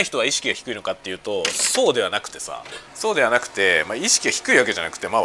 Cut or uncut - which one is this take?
cut